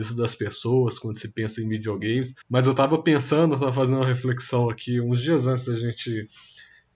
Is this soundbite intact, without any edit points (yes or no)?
no